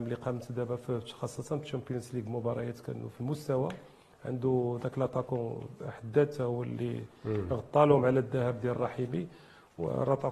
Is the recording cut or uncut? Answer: uncut